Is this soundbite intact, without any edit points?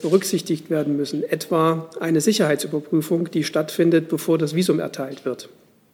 yes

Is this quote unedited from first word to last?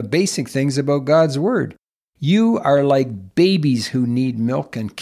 yes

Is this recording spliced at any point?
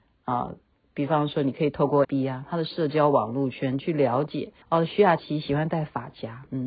yes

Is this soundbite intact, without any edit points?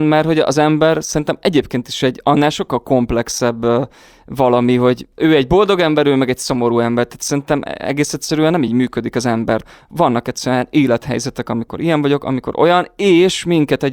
yes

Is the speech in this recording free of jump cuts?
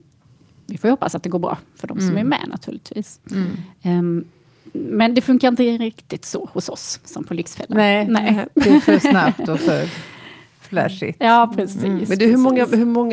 yes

